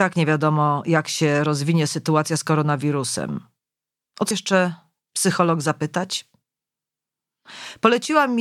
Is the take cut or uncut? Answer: cut